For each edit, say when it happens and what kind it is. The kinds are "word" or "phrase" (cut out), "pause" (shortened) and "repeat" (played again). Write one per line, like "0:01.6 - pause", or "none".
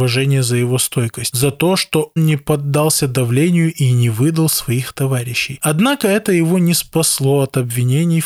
0:02.2 - word